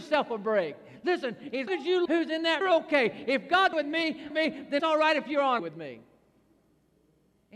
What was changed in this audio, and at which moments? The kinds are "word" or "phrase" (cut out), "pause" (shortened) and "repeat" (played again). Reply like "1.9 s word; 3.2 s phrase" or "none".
1.7 s word; 2.1 s word; 2.6 s phrase; 3.7 s word; 4.3 s phrase; 4.8 s word; 5.6 s word